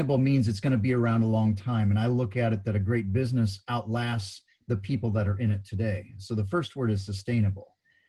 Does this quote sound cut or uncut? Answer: uncut